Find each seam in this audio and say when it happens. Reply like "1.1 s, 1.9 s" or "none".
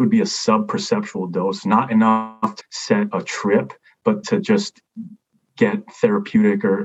2.6 s, 3.1 s, 4.2 s